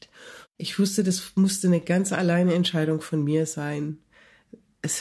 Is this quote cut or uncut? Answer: uncut